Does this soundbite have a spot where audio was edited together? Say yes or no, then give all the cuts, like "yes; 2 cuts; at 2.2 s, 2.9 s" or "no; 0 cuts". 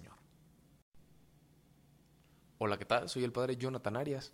no; 0 cuts